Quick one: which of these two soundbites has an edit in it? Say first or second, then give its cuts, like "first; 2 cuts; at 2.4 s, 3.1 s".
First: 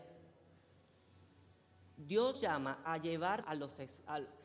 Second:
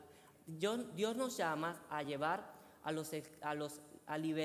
first; 3 cuts; at 2.3 s, 2.8 s, 3.4 s